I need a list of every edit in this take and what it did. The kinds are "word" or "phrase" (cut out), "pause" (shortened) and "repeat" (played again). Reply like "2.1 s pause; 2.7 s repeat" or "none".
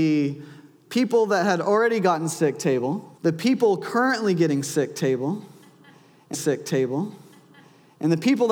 3.2 s pause; 6.3 s repeat

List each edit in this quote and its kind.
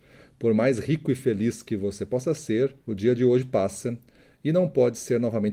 2.8 s pause

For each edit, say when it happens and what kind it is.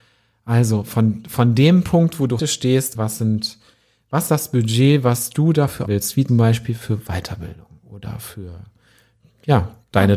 2.4 s word; 3.0 s word; 4.3 s word; 5.9 s word; 6.3 s word

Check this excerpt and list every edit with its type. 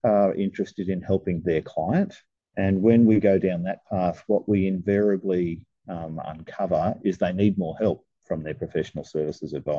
none

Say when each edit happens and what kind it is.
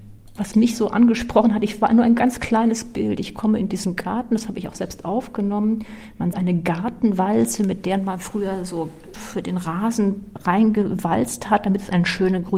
6.3 s word; 9.1 s word

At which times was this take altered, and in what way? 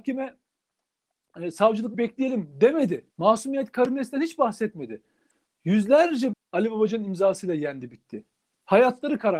1.9 s phrase; 3.1 s pause; 6.3 s word

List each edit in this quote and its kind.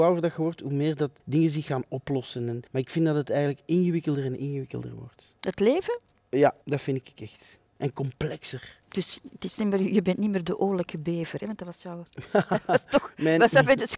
1.2 s pause; 2.7 s pause; 5.4 s pause; 6.6 s pause; 7.7 s pause; 8.8 s pause

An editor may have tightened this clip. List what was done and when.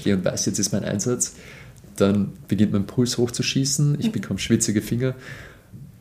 none

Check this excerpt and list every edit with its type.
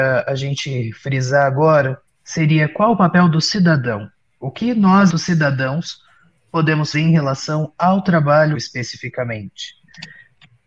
2.1 s word; 5.1 s word; 6.9 s word; 8.5 s word

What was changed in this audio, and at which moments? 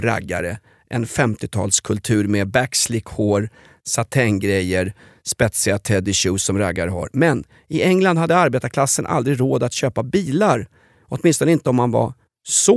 none

